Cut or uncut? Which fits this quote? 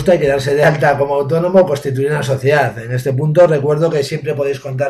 uncut